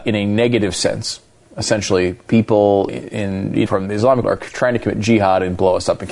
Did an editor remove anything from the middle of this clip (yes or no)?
yes